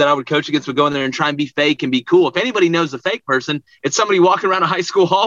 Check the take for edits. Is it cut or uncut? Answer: uncut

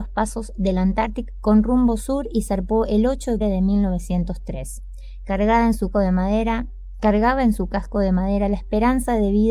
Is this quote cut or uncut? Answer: cut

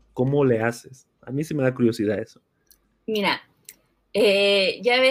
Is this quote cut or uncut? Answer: uncut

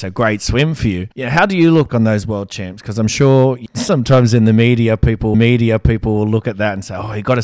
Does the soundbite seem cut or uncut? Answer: cut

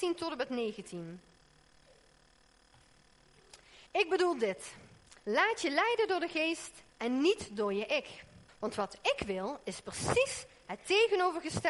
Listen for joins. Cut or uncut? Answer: cut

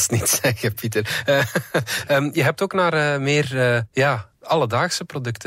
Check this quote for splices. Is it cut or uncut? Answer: cut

